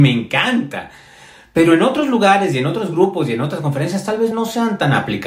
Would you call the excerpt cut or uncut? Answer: uncut